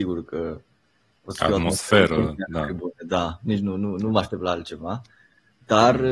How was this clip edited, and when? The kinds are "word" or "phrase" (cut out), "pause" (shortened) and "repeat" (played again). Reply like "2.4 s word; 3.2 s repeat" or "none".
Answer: none